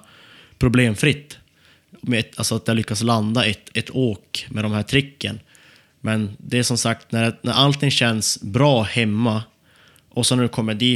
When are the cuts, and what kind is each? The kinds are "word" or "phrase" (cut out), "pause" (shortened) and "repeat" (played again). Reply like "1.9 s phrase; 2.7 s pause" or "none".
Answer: none